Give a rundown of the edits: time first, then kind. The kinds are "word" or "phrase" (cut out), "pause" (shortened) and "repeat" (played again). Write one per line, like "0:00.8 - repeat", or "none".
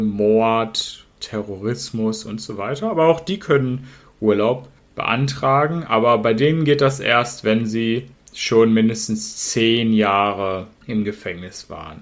0:04.8 - pause
0:08.2 - pause
0:10.7 - pause